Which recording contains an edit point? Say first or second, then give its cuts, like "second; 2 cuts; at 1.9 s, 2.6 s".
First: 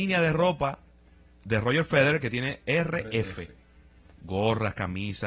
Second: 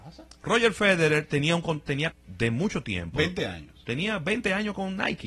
second; 1 cut; at 2.1 s